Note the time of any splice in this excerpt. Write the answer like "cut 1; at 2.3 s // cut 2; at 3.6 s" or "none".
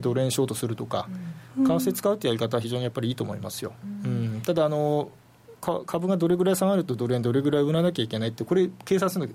none